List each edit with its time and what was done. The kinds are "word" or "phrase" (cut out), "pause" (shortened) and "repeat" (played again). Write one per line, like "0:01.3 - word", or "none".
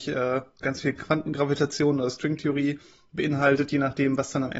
none